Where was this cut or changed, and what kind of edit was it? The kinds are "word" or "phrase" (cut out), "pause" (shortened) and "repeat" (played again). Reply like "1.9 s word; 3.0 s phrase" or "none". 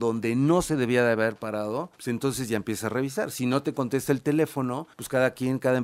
1.9 s pause; 4.9 s pause